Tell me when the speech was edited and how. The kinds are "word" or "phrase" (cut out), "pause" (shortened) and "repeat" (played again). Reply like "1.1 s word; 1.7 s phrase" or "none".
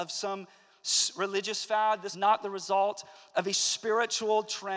2.1 s word